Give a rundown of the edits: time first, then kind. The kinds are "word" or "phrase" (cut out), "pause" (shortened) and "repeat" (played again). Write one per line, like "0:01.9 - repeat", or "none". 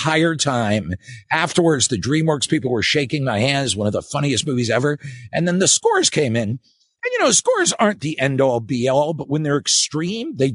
none